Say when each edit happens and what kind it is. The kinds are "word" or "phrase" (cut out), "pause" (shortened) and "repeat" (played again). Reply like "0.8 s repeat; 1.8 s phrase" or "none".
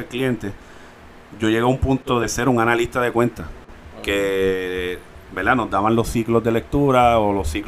none